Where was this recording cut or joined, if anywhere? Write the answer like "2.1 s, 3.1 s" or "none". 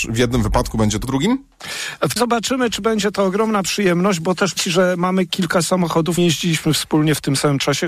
1.0 s, 2.2 s, 4.6 s, 6.2 s